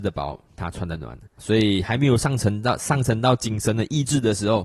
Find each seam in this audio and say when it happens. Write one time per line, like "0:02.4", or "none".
0:01.4